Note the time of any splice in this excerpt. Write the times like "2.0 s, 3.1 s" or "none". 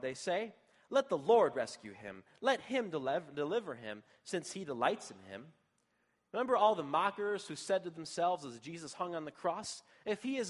none